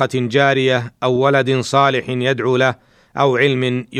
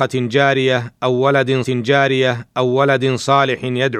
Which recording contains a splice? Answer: second; 1 cut; at 1.6 s

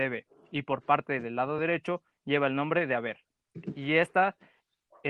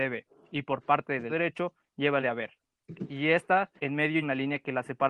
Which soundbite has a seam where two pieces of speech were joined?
second; 4 cuts; at 1.3 s, 2.2 s, 3.8 s, 4.2 s

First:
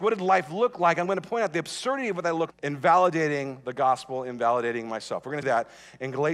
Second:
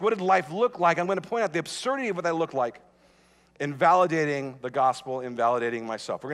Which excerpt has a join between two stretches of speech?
first; 2 cuts; at 2.5 s, 5.4 s

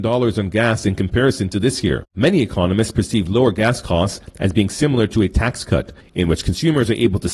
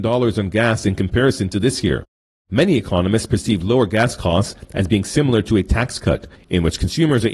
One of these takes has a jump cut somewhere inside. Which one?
first; 1 cut; at 2.1 s

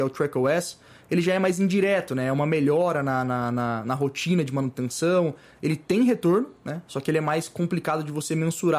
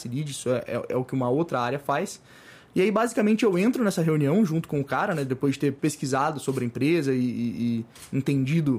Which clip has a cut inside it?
second; 1 cut; at 5.8 s

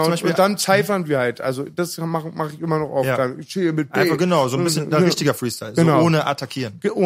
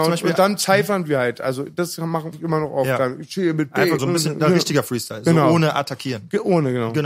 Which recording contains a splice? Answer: second; 2 cuts; at 2.3 s, 4.0 s

